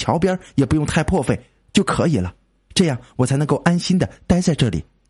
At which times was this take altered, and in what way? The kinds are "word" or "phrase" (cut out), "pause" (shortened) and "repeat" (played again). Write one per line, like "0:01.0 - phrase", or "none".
none